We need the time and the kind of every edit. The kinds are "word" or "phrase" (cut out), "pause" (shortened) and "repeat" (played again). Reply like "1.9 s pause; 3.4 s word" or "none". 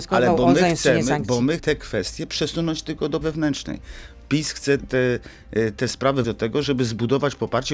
1.6 s word; 3.2 s word; 4.8 s word; 6.2 s word